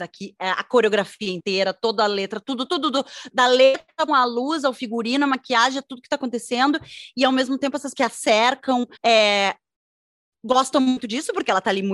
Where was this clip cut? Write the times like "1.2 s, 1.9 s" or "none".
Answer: 2.7 s, 3.3 s, 4.1 s, 7.9 s, 9.0 s